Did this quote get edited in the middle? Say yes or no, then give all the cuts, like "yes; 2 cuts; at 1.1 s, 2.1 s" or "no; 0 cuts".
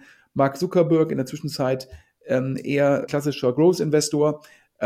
yes; 1 cut; at 3.1 s